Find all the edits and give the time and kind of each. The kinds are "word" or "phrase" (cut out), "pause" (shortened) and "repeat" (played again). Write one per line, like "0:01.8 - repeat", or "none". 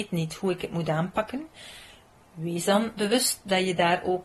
none